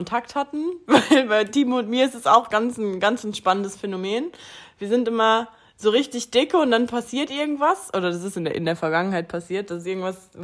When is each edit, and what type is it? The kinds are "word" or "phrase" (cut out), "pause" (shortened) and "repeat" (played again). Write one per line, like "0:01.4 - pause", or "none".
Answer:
none